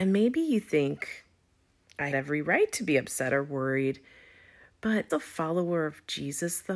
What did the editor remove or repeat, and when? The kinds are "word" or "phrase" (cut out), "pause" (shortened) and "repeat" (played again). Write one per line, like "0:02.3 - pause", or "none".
0:02.1 - word
0:05.1 - word